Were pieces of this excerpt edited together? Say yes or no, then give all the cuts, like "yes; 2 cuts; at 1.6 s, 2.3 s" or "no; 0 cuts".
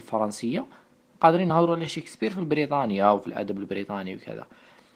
no; 0 cuts